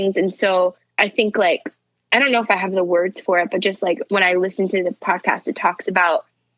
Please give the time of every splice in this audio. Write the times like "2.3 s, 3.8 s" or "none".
none